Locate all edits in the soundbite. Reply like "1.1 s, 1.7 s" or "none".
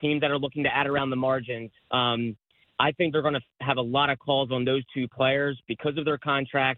1.8 s